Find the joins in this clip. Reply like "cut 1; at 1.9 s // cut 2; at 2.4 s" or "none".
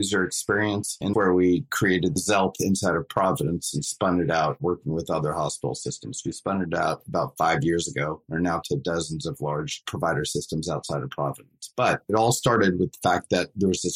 cut 1; at 1.1 s // cut 2; at 8.6 s

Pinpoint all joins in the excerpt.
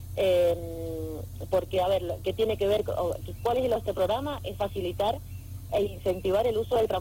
cut 1; at 3.8 s // cut 2; at 5.7 s

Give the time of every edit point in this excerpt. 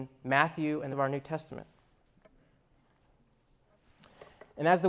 cut 1; at 0.9 s

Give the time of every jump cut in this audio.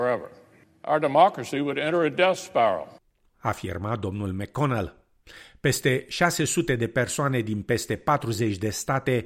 none

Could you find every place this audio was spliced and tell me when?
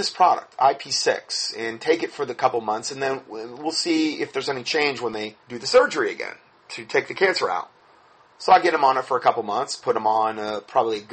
cut 1; at 5.4 s

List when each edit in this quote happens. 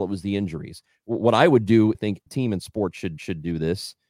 cut 1; at 1.9 s // cut 2; at 2.3 s // cut 3; at 3.2 s

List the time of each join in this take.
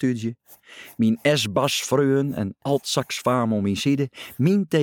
none

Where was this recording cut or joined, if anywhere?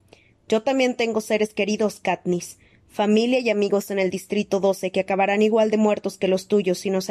none

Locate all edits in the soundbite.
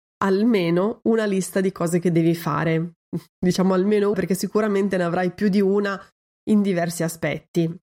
cut 1; at 4.1 s

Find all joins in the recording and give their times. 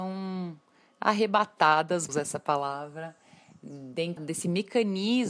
cut 1; at 2.1 s // cut 2; at 4.2 s

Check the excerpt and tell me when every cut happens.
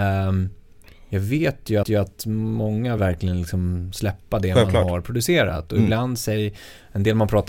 cut 1; at 1.8 s // cut 2; at 3.0 s

